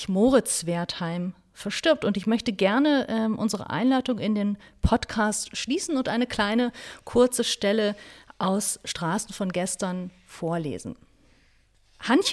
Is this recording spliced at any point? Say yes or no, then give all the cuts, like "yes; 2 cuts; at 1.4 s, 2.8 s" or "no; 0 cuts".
no; 0 cuts